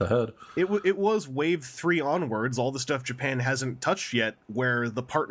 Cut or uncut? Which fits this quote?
uncut